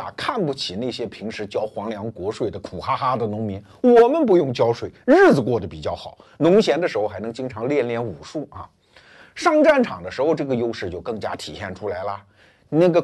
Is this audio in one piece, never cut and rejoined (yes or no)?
yes